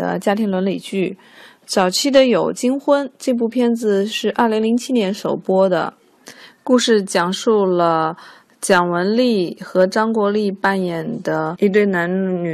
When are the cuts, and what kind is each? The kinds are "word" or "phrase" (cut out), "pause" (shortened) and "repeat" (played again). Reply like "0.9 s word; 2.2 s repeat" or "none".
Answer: none